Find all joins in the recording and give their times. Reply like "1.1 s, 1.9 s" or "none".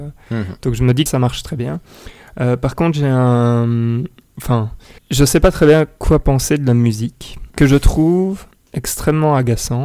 1.1 s, 5.0 s, 7.5 s, 8.5 s